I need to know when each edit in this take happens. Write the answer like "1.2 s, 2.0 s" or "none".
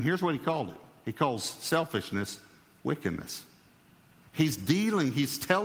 none